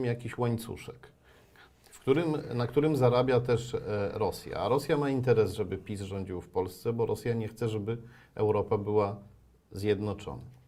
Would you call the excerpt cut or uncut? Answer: uncut